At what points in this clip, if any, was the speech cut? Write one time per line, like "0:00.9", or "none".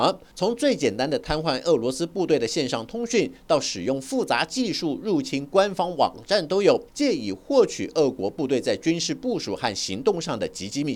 0:06.9